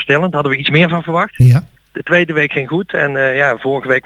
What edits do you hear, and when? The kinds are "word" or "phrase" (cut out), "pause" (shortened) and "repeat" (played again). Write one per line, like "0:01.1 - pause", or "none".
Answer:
0:01.8 - pause